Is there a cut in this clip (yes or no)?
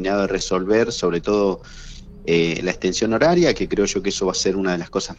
no